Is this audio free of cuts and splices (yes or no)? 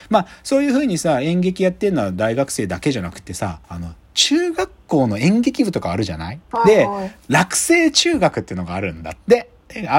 no